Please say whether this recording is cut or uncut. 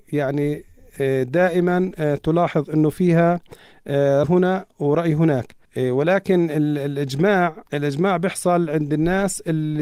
cut